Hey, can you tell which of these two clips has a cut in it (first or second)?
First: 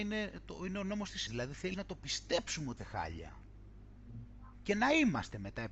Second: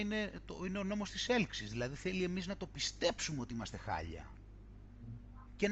first